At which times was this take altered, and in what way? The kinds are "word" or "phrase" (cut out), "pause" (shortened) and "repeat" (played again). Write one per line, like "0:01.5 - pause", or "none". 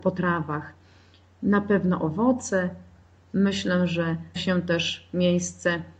0:04.4 - word